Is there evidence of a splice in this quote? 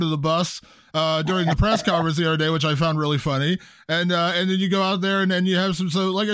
no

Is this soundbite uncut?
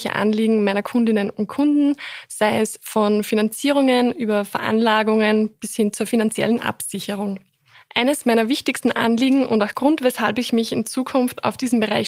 yes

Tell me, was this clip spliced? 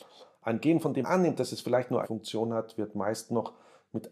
yes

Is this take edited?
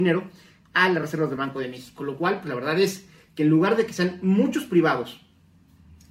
no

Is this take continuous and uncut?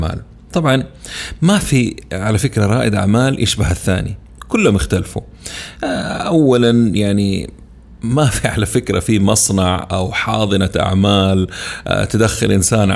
yes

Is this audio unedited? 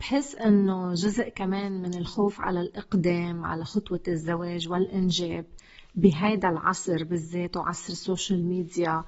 yes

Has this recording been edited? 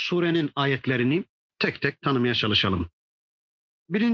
no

